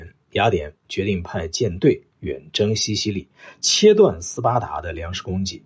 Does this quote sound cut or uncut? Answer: cut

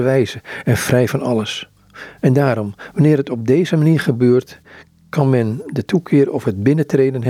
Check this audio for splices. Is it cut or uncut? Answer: uncut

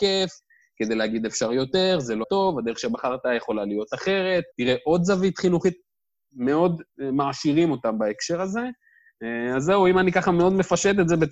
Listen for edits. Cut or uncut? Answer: cut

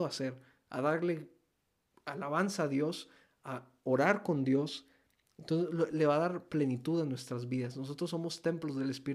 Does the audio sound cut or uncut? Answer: uncut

